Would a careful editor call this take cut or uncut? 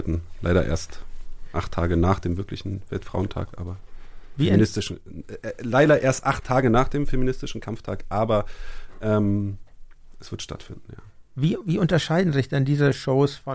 uncut